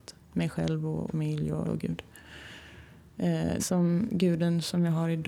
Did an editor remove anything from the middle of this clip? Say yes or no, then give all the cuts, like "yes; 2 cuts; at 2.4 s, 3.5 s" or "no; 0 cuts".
yes; 4 cuts; at 1.1 s, 1.6 s, 3.6 s, 4.1 s